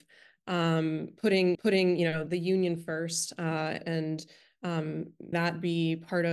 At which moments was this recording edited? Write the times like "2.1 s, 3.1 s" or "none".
1.5 s, 2.3 s, 3.8 s, 5.3 s